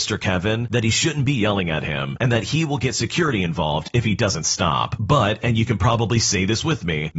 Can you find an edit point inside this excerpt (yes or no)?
no